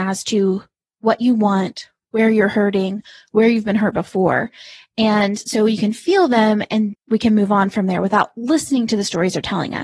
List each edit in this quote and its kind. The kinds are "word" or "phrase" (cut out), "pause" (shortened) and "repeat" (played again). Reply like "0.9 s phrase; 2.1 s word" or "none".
6.9 s word

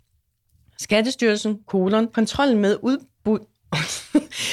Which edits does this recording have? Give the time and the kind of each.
none

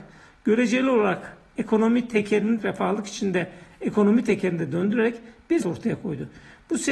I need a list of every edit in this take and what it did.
2.6 s phrase; 5.6 s word

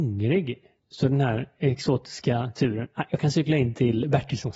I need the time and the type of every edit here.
none

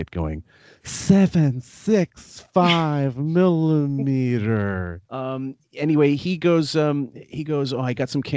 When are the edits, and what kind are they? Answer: 5.1 s pause

